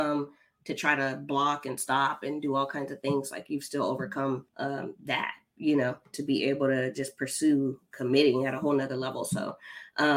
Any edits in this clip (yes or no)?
yes